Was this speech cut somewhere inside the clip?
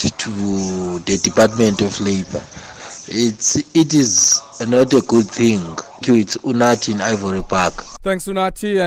yes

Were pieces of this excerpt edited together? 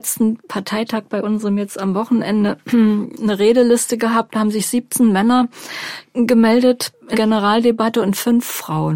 yes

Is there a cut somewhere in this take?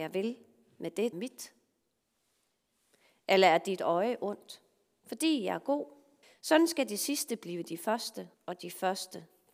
yes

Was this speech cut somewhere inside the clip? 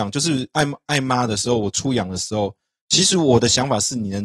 no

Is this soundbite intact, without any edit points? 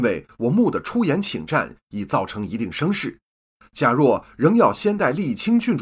yes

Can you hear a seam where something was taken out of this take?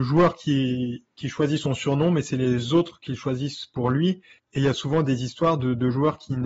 no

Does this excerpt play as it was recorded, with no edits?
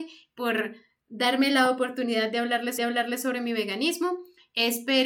no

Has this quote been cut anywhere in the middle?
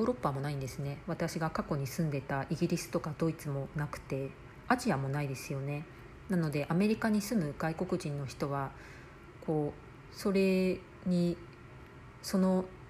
no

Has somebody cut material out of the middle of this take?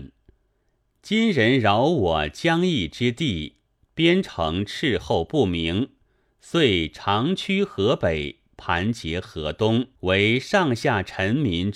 yes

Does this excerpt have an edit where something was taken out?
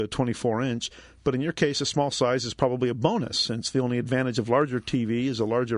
no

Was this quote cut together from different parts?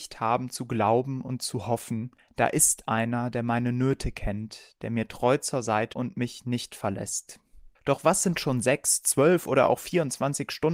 yes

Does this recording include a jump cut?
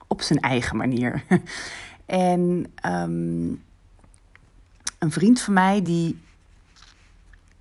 no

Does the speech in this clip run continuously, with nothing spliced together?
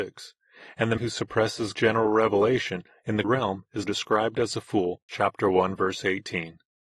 no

